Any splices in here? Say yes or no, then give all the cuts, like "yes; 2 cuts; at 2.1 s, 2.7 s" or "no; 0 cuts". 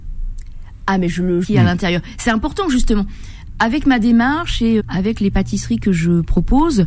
yes; 2 cuts; at 1.4 s, 4.8 s